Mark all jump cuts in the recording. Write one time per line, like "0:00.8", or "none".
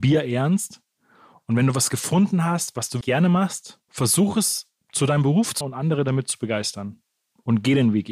0:03.0
0:05.6